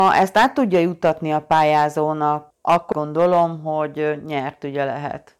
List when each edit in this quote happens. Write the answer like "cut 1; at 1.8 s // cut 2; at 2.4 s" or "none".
cut 1; at 2.9 s